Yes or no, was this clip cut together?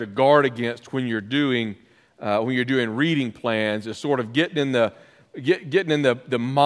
no